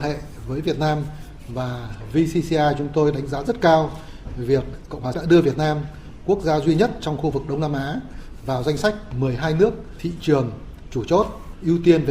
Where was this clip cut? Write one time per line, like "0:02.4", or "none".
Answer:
0:05.1